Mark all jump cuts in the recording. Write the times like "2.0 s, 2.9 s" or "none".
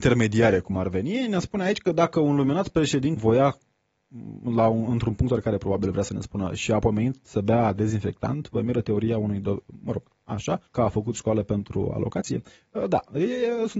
3.2 s, 10.7 s